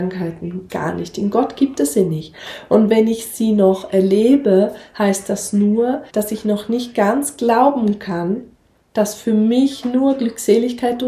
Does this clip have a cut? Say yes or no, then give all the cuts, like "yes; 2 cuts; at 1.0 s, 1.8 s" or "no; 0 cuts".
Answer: yes; 1 cut; at 6.1 s